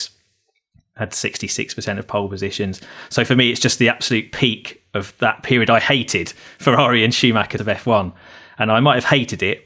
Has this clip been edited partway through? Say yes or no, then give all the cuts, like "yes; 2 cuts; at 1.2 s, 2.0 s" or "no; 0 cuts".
yes; 1 cut; at 7.6 s